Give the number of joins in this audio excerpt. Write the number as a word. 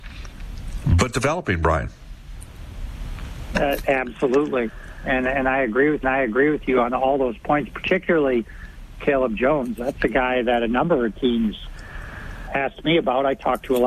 three